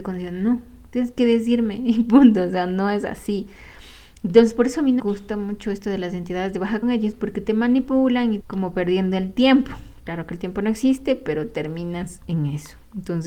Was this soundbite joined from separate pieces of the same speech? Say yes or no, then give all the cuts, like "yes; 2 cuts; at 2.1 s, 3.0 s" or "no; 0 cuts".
yes; 3 cuts; at 5.0 s, 6.8 s, 8.4 s